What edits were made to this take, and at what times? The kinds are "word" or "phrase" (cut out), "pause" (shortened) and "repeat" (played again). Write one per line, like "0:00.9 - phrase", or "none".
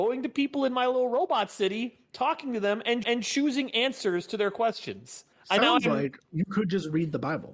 0:03.0 - repeat
0:05.3 - pause
0:06.2 - pause